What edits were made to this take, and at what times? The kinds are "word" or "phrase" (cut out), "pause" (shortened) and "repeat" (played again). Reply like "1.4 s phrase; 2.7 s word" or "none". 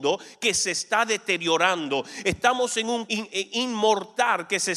3.1 s word